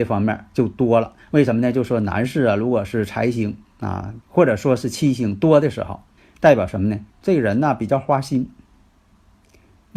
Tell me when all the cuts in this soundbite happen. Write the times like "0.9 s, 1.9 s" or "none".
1.2 s, 4.2 s, 6.2 s, 7.1 s